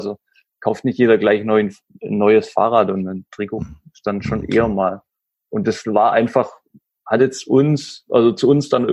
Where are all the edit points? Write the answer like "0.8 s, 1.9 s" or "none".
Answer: none

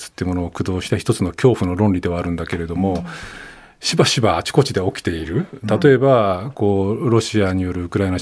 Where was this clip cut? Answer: none

